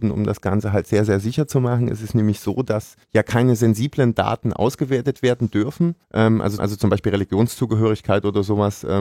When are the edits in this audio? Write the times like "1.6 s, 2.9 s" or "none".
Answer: 3.0 s, 6.0 s, 6.6 s